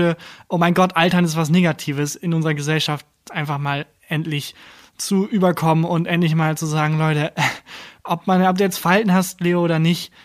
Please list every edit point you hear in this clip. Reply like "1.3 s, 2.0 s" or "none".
none

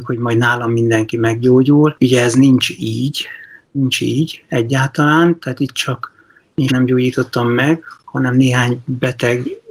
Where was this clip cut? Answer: 6.7 s

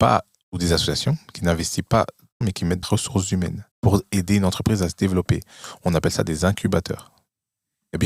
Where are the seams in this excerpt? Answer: 2.4 s, 2.8 s, 3.7 s

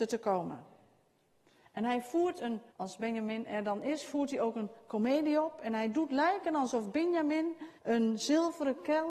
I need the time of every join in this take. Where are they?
2.7 s, 7.8 s

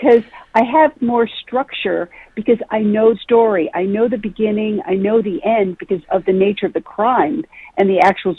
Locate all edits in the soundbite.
1.0 s, 3.1 s, 6.0 s

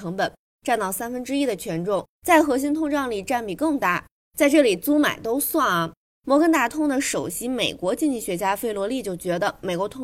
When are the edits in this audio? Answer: none

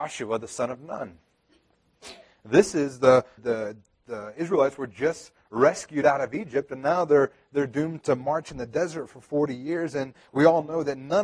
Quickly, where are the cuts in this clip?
3.4 s, 8.0 s

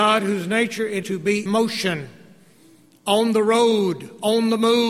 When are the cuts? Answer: 1.0 s, 1.5 s

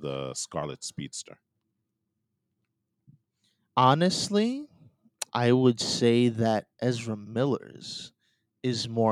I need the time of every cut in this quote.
5.3 s, 6.7 s

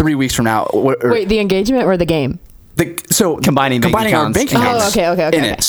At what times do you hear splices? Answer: none

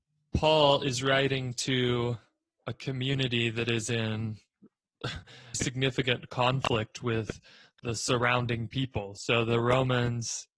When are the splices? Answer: 5.5 s

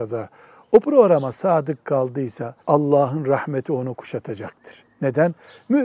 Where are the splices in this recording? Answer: 2.6 s

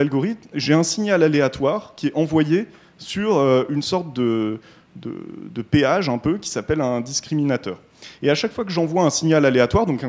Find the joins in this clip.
none

